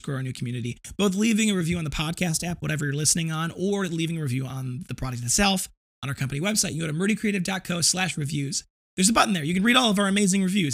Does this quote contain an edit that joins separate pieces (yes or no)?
no